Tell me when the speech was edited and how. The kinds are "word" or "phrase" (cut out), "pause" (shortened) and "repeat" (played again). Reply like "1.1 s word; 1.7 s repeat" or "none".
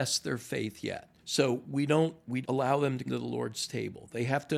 1.2 s pause; 2.4 s word; 3.1 s word